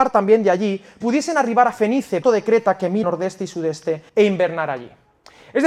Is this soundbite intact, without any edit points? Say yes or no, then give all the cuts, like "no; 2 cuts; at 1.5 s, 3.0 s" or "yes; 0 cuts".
no; 4 cuts; at 1.0 s, 2.2 s, 3.0 s, 4.1 s